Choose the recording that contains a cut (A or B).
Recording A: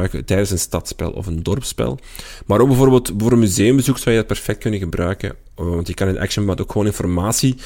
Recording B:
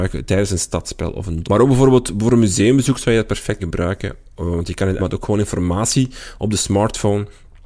B